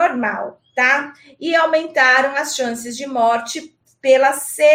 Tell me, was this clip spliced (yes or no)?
no